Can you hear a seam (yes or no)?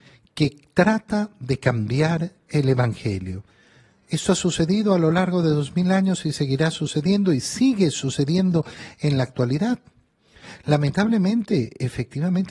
no